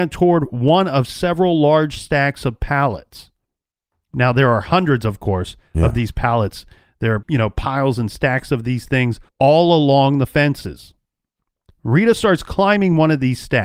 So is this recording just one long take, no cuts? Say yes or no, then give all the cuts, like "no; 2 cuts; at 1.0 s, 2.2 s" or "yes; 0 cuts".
no; 2 cuts; at 7.2 s, 9.3 s